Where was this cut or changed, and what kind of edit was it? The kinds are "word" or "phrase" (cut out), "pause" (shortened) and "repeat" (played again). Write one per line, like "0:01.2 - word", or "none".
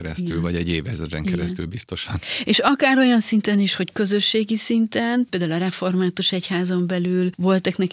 none